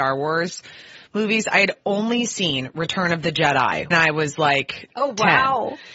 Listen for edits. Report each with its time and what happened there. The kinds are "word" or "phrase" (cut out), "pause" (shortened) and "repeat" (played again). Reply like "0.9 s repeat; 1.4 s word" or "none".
3.9 s word